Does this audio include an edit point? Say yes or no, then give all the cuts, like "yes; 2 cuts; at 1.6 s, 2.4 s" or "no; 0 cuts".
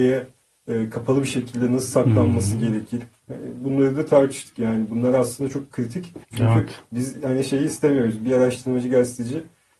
yes; 1 cut; at 6.2 s